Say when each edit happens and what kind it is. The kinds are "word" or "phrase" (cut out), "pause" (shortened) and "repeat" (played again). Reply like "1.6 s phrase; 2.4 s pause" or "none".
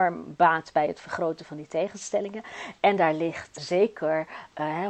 3.6 s word